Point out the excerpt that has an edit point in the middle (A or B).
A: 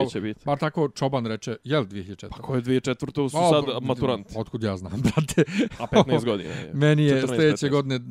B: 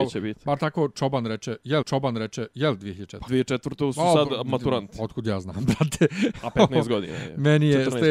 B